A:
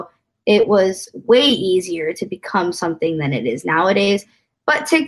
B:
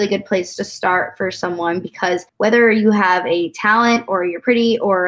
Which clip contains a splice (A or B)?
B